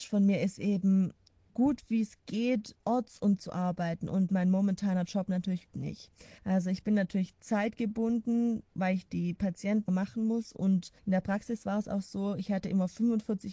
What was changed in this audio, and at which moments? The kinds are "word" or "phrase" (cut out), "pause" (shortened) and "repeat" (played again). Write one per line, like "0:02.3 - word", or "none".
0:01.5 - word
0:02.8 - pause
0:03.4 - word
0:04.3 - phrase
0:05.7 - word
0:06.4 - pause
0:08.7 - pause
0:09.9 - word
0:11.0 - pause